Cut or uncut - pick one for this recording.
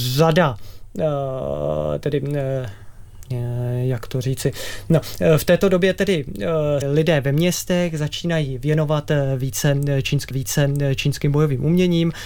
cut